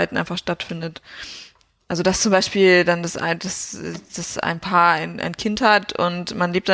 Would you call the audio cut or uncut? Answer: uncut